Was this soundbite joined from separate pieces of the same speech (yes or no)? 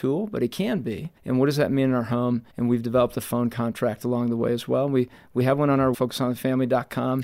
yes